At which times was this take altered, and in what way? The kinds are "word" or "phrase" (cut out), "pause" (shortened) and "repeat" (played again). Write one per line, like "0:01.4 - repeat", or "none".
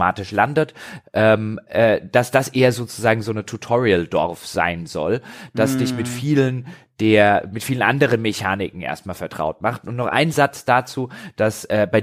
none